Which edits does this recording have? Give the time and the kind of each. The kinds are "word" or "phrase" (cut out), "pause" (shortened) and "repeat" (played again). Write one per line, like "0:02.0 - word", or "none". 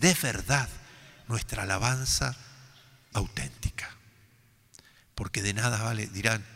0:03.1 - word